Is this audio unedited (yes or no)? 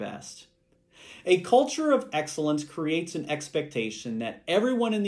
yes